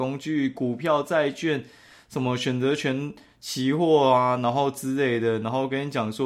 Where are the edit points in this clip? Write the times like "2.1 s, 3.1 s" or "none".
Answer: none